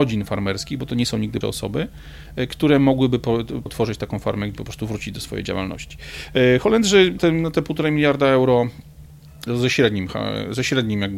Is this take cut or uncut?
cut